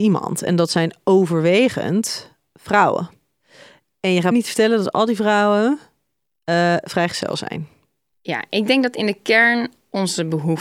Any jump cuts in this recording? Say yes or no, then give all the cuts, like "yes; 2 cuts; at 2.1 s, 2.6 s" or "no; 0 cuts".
yes; 1 cut; at 4.3 s